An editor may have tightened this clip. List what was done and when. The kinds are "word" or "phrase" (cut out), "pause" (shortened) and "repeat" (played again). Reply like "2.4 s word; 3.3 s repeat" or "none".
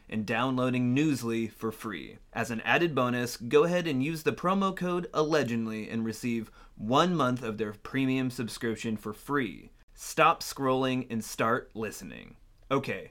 2.3 s pause